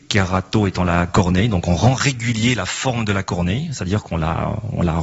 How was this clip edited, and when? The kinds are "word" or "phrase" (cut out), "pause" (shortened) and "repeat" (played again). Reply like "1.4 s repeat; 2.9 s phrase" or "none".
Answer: none